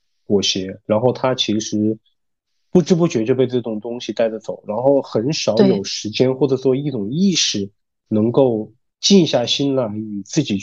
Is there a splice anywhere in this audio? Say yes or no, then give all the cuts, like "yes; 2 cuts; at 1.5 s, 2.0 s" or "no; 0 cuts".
no; 0 cuts